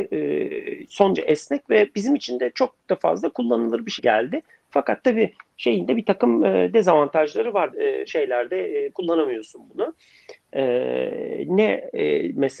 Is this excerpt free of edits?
no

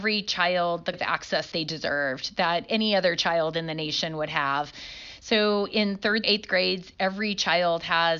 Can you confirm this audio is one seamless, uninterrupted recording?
no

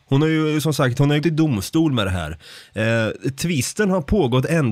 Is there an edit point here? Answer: yes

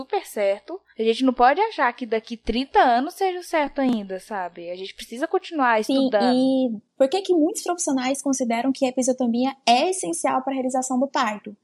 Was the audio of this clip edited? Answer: no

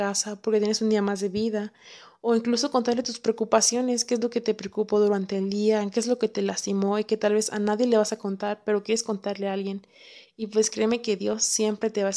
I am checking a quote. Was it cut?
no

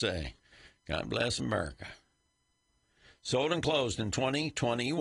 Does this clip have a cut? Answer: no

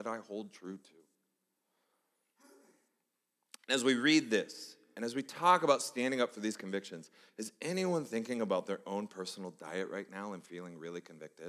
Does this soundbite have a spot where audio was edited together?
no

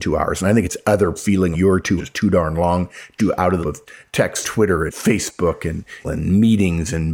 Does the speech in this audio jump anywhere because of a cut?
yes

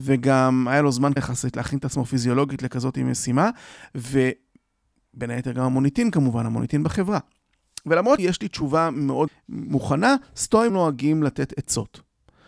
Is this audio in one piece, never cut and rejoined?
no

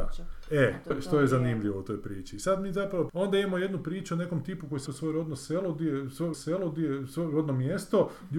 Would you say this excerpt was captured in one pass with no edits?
no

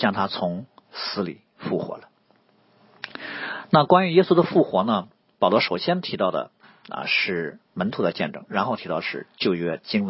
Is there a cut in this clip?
no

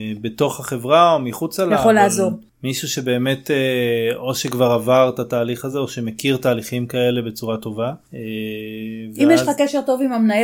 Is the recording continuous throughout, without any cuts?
yes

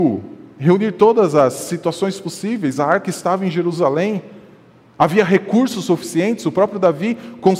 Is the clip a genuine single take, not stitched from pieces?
yes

